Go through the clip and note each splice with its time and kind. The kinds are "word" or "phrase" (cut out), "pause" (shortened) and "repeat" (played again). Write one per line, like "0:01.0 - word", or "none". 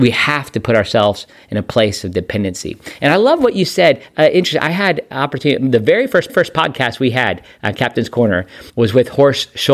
0:06.3 - repeat
0:08.7 - pause